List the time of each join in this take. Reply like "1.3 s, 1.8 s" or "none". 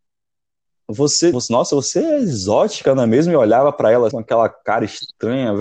1.3 s, 4.1 s